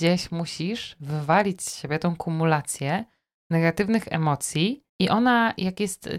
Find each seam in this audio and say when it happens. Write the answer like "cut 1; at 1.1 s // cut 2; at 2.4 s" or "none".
cut 1; at 4.9 s